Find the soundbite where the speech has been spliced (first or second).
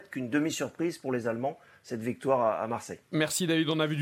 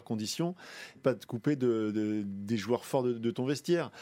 second